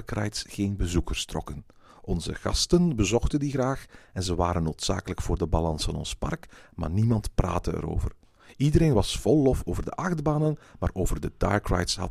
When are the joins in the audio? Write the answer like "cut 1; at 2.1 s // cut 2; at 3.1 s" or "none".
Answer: none